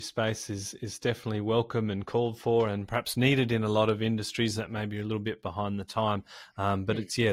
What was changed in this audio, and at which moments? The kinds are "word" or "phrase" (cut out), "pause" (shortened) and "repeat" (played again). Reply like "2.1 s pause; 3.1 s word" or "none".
none